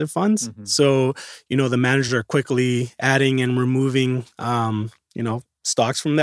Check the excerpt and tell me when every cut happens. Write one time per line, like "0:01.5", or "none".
none